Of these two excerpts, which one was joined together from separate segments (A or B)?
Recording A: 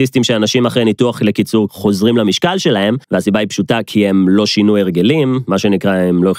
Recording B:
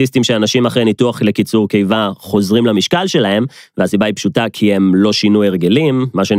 A